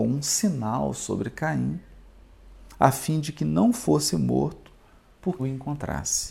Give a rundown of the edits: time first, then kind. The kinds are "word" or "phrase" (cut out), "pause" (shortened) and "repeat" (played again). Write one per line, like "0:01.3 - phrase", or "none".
0:05.4 - word